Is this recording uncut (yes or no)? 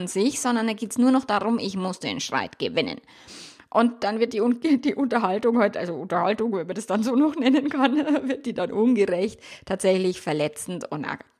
yes